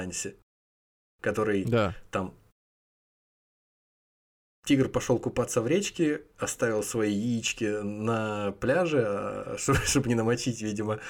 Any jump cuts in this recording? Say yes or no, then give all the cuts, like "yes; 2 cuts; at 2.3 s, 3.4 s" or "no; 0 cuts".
no; 0 cuts